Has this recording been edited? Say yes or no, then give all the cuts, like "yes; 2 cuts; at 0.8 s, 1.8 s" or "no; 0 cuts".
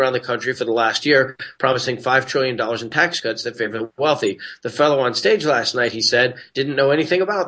no; 0 cuts